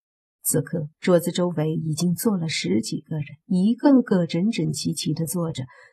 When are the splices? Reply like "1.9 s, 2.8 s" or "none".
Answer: 0.9 s, 3.4 s

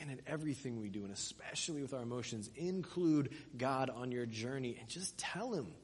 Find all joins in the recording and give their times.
none

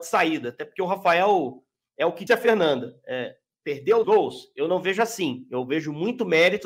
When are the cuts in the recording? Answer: 2.3 s, 4.0 s

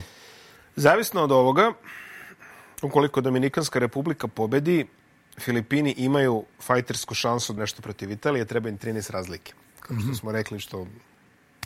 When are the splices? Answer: 7.6 s

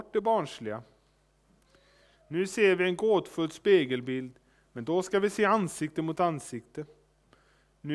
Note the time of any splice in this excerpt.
none

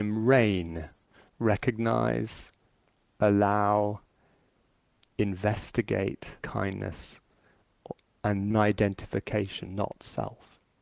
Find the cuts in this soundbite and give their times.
6.4 s, 8.5 s, 9.7 s

